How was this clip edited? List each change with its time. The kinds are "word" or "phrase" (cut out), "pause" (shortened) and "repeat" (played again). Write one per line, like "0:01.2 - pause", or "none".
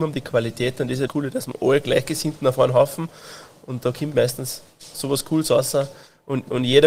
0:01.1 - word